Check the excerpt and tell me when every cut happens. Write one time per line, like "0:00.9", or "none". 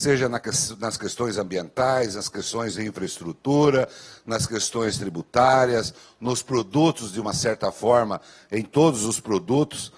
none